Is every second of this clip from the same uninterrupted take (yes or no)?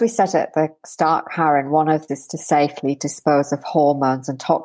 no